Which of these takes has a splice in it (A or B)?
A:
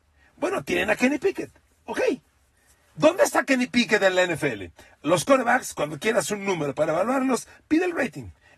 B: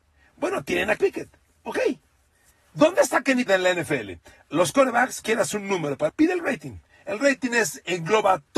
B